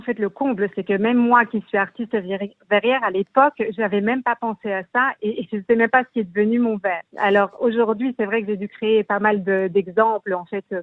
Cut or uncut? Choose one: cut